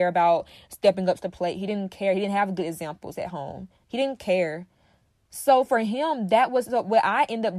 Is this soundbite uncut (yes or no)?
yes